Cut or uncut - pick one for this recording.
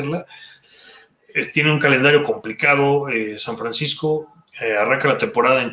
uncut